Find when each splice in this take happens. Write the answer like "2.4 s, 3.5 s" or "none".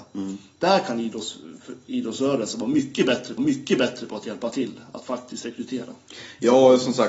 3.4 s